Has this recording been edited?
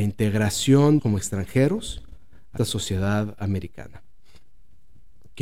yes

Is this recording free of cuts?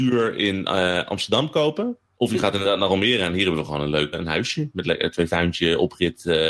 no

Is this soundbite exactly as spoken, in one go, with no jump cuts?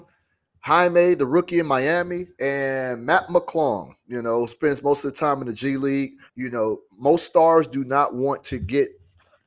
no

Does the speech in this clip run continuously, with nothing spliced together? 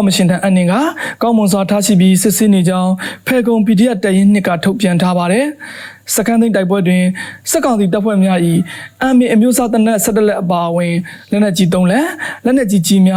yes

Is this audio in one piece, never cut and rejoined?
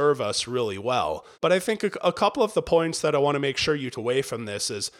no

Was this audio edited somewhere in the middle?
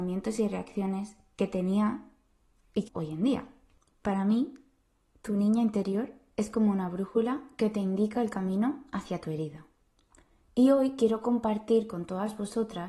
yes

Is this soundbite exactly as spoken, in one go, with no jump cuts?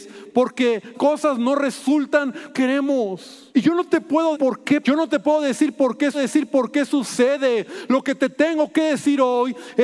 no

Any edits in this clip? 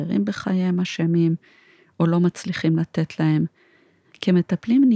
no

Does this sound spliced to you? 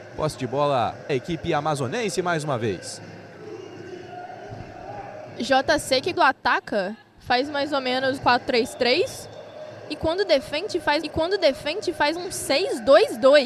yes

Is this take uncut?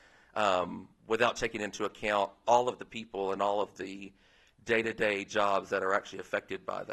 yes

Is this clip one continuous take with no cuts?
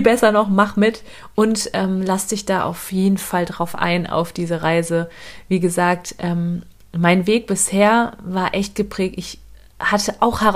yes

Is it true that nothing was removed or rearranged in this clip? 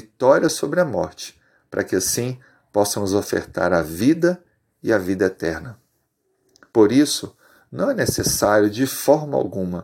yes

